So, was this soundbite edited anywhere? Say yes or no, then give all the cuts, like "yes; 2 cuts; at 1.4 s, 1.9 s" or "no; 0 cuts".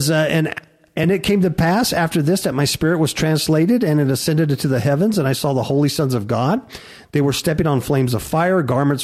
no; 0 cuts